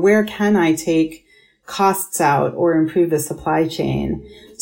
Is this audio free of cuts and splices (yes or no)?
yes